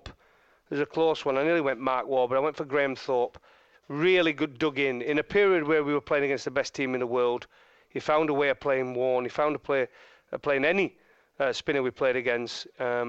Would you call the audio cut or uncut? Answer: uncut